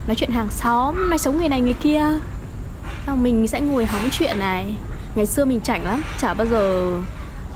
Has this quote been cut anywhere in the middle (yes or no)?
no